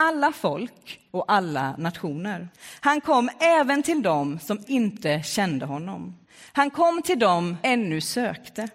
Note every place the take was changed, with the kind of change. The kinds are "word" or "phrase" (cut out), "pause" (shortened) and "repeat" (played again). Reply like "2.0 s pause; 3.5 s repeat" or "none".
1.1 s pause; 2.5 s pause; 4.6 s word; 6.2 s pause; 7.6 s word